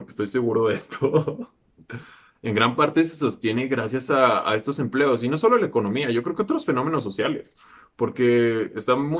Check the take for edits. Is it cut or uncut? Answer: uncut